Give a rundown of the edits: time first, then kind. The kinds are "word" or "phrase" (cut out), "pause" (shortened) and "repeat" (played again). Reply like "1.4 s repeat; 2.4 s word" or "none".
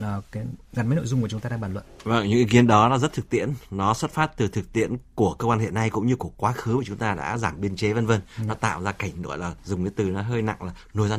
9.6 s pause